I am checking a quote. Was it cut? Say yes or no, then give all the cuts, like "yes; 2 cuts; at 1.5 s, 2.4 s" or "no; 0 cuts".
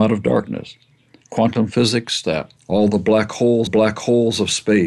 yes; 3 cuts; at 2.2 s, 2.6 s, 3.7 s